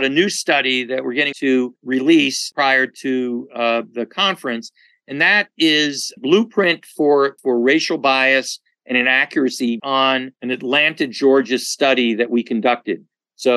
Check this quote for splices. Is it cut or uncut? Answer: cut